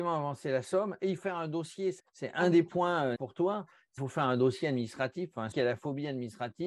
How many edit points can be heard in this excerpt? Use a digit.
5